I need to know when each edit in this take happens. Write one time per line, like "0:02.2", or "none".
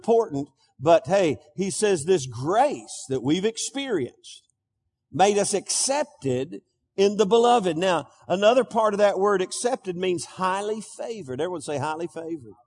none